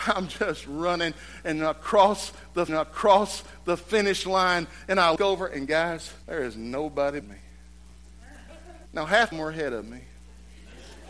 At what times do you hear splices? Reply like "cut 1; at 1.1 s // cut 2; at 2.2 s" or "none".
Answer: cut 1; at 2.7 s // cut 2; at 5.2 s // cut 3; at 6.2 s // cut 4; at 7.2 s // cut 5; at 8.9 s // cut 6; at 9.3 s